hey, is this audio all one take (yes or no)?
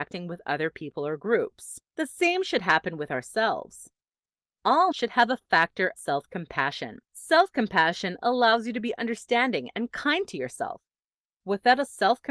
no